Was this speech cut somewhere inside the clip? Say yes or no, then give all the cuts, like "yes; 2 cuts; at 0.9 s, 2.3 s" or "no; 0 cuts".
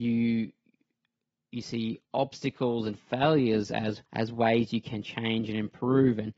yes; 2 cuts; at 2.1 s, 4.1 s